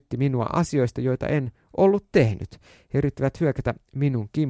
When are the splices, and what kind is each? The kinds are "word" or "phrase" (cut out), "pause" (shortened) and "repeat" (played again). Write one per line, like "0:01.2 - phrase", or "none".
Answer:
none